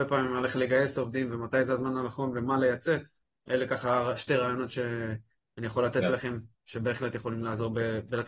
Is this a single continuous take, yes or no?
yes